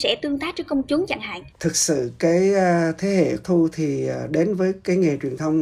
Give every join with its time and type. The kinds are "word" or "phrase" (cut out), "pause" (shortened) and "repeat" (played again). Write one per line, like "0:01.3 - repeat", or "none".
0:01.5 - pause
0:03.4 - word